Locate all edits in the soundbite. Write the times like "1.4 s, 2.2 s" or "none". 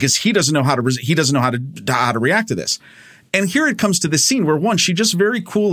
none